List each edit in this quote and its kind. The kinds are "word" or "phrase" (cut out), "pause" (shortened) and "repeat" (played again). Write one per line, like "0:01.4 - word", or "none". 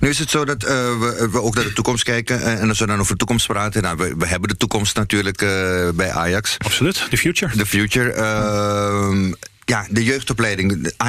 none